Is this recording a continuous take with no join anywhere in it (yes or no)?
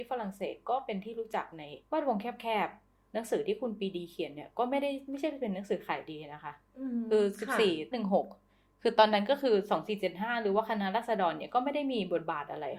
no